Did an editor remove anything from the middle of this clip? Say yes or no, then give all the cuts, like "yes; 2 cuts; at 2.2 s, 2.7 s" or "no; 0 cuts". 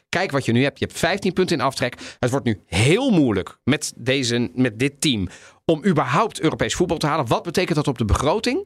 no; 0 cuts